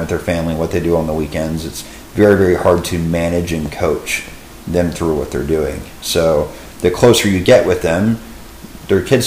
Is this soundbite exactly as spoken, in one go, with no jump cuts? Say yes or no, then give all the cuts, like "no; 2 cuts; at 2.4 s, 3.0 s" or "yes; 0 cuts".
yes; 0 cuts